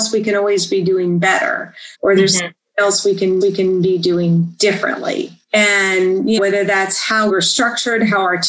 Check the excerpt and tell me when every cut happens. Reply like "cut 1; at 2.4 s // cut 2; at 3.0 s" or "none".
cut 1; at 1.9 s // cut 2; at 3.4 s // cut 3; at 5.4 s // cut 4; at 6.4 s // cut 5; at 7.3 s